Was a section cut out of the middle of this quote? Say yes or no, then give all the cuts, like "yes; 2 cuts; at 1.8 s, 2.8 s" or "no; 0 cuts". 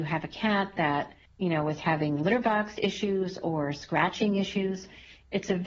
yes; 1 cut; at 1.2 s